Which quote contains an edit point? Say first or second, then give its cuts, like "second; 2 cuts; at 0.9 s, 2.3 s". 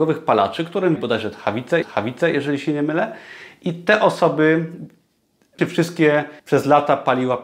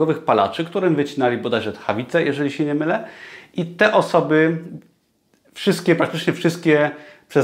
first; 4 cuts; at 1.0 s, 1.8 s, 5.6 s, 6.4 s